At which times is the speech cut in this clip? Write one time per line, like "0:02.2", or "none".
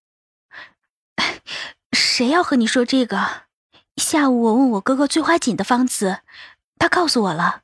0:03.6